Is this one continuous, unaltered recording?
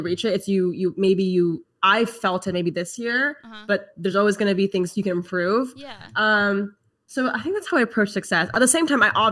yes; 0 cuts

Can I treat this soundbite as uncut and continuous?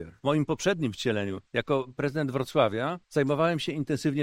no; 2 cuts; at 1.5 s, 3.0 s

